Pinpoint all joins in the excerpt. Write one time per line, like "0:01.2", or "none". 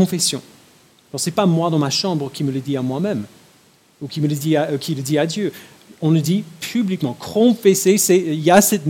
none